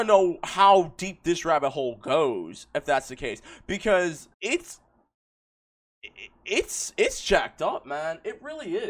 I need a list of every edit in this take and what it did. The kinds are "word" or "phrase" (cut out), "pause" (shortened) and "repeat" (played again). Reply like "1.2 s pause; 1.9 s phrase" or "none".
4.3 s pause